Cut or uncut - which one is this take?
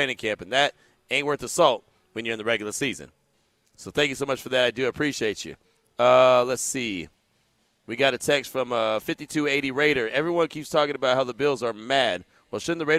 uncut